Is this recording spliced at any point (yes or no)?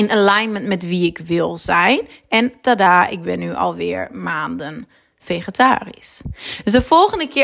no